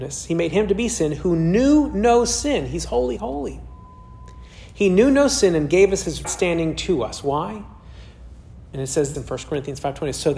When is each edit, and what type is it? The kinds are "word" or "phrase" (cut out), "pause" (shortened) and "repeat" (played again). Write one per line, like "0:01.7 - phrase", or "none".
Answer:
0:03.2 - word
0:06.2 - word
0:09.1 - word